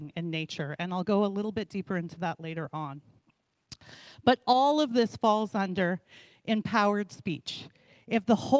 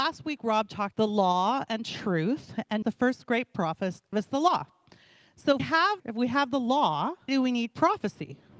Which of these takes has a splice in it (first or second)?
second